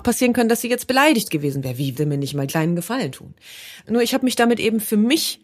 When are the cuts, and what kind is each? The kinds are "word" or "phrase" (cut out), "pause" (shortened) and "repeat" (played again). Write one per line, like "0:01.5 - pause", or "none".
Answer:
0:01.9 - word
0:02.5 - word

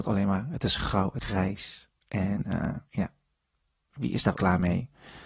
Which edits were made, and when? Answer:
0:01.2 - word
0:02.0 - pause
0:02.8 - pause
0:04.3 - word

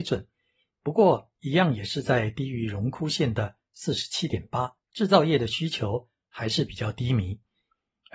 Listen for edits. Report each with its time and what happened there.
0:04.8 - pause

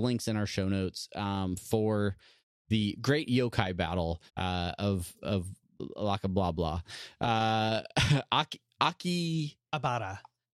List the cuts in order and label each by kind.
0:04.3 - pause

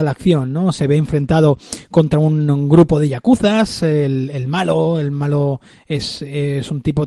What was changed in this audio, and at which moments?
none

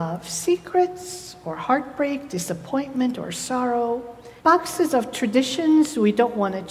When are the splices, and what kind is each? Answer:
0:04.4 - pause

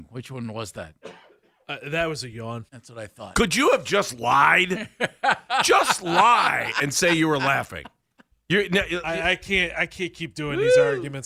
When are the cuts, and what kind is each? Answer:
0:02.7 - pause

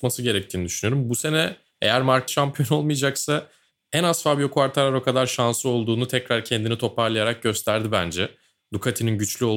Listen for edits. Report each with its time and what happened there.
0:02.3 - word

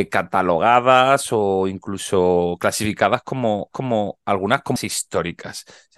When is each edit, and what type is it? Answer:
0:03.7 - repeat
0:04.8 - word

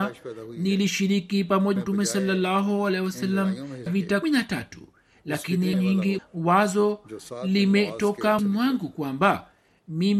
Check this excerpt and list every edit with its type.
0:01.8 - word
0:03.9 - word
0:04.2 - word
0:05.7 - word
0:06.2 - word
0:08.4 - word

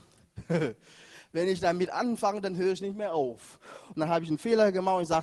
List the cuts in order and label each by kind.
none

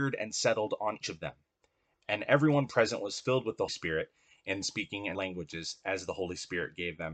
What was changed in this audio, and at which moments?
0:01.0 - word
0:03.7 - word
0:04.6 - word
0:05.1 - word

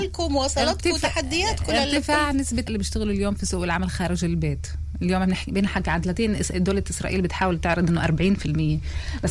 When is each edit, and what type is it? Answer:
0:02.7 - word

